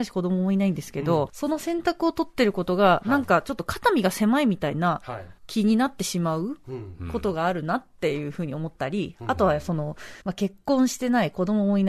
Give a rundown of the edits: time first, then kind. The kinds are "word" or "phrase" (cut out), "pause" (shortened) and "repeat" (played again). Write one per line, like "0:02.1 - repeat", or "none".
0:01.3 - phrase
0:05.4 - pause
0:10.2 - pause